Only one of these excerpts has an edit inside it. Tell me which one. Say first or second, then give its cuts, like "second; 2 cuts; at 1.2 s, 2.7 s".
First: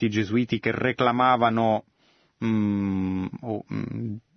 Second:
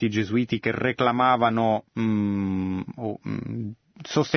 second; 1 cut; at 1.9 s